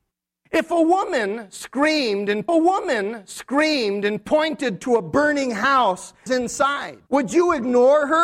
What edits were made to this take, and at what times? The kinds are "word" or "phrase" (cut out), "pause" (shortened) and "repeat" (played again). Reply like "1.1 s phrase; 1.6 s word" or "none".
2.5 s repeat; 6.3 s phrase; 7.1 s pause